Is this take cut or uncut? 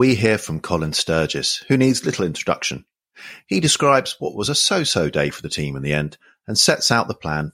uncut